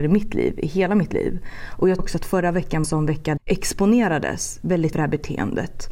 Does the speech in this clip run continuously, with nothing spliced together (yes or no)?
no